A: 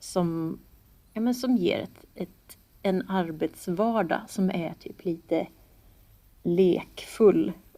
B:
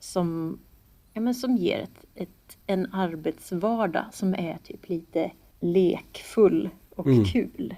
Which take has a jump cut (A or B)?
B